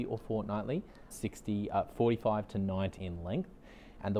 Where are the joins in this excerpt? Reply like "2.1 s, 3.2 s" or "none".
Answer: 1.1 s, 3.0 s